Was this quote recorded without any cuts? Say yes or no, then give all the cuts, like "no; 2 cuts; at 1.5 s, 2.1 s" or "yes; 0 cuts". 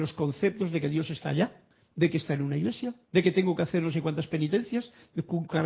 no; 2 cuts; at 1.7 s, 3.0 s